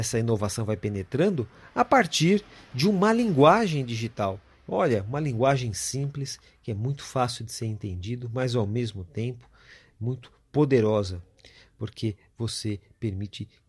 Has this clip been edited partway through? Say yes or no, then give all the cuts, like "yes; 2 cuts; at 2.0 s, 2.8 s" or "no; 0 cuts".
no; 0 cuts